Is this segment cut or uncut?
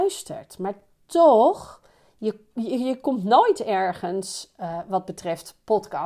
uncut